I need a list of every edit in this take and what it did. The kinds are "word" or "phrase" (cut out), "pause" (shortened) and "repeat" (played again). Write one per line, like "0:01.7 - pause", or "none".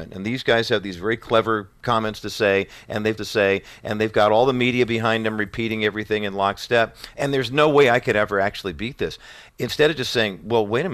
0:03.2 - repeat

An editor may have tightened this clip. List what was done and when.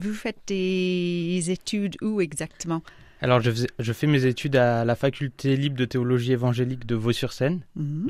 none

